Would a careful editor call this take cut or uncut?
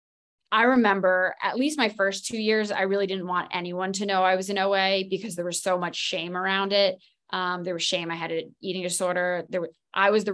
uncut